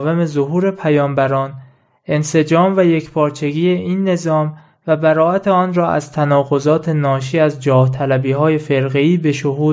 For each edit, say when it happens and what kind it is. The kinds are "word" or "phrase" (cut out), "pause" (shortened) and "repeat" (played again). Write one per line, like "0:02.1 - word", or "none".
none